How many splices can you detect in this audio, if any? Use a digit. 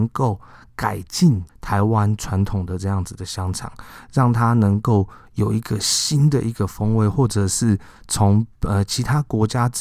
1